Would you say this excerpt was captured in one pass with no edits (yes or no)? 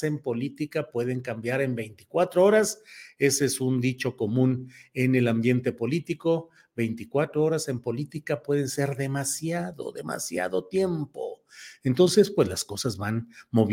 yes